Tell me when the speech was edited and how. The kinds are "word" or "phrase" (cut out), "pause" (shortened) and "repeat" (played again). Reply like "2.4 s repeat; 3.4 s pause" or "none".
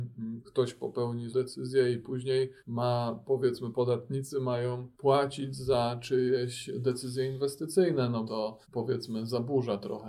1.3 s word; 2.6 s pause; 3.7 s word; 4.9 s pause; 8.3 s word; 8.6 s pause

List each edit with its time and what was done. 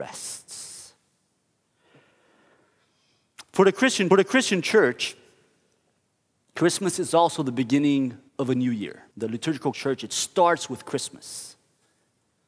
4.1 s repeat; 8.3 s pause; 9.1 s pause; 9.7 s phrase

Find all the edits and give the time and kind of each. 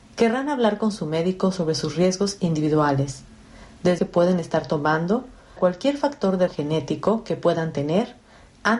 4.0 s phrase; 5.6 s word; 6.5 s word

